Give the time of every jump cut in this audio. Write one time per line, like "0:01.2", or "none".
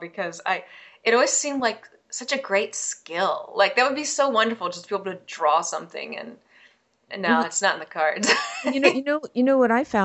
none